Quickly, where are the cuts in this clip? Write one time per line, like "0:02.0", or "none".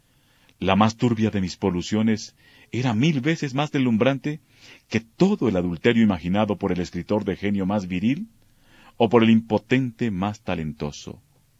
none